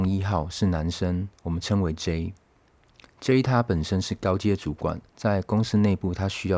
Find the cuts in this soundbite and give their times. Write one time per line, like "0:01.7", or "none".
0:05.1